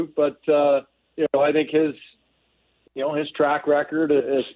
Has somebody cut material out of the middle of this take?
no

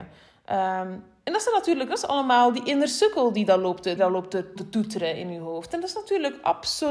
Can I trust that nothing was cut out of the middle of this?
no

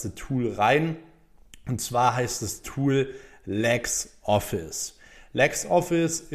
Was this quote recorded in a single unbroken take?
yes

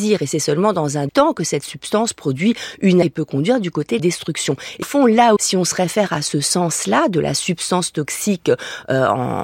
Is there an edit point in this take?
yes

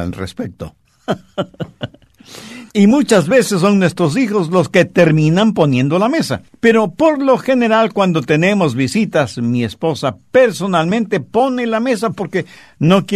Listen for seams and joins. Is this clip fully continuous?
no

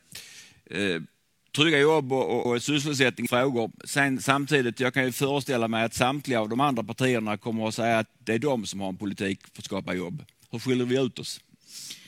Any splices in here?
yes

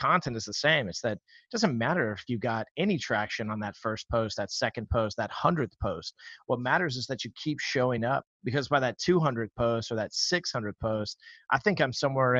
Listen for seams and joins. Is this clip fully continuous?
yes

